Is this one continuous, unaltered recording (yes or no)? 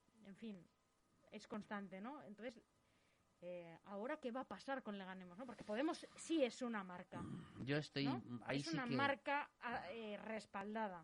yes